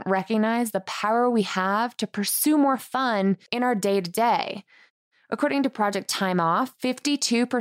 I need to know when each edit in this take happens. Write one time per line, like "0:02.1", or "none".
0:03.5
0:05.1